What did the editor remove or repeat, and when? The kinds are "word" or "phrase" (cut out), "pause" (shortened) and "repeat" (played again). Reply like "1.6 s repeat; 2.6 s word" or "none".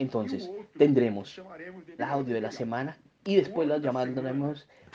2.0 s word